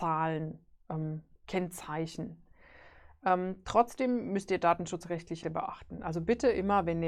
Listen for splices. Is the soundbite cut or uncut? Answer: cut